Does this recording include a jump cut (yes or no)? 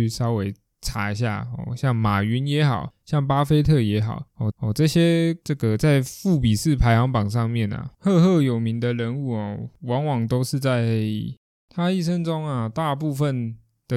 yes